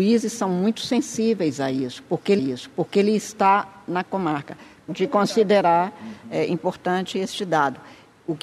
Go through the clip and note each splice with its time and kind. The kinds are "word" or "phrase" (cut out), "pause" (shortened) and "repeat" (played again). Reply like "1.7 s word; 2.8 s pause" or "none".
2.4 s repeat; 4.9 s phrase